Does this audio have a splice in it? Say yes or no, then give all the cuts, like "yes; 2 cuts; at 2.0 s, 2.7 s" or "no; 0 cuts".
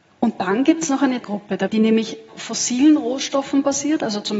yes; 3 cuts; at 1.2 s, 1.7 s, 2.3 s